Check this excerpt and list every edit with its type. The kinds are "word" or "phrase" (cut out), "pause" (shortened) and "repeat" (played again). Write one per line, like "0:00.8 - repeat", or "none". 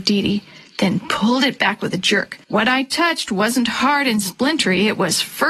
0:02.4 - pause